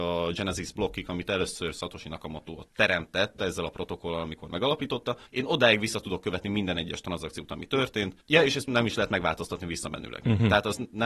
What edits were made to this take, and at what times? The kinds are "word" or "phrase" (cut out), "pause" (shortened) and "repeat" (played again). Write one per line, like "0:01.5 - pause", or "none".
0:02.7 - pause
0:05.3 - pause
0:08.2 - pause